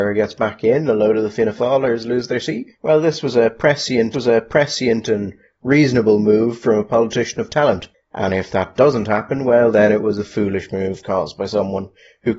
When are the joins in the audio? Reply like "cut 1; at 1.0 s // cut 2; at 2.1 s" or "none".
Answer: cut 1; at 2.7 s // cut 2; at 4.1 s